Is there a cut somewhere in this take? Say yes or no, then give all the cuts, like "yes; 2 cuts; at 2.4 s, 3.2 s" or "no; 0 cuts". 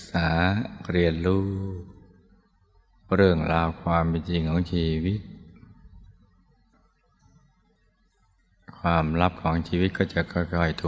no; 0 cuts